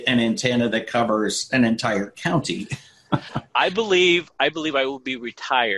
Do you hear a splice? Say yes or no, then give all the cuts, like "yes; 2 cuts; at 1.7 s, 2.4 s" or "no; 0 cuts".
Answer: no; 0 cuts